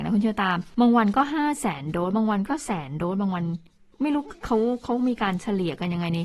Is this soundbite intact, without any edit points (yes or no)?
yes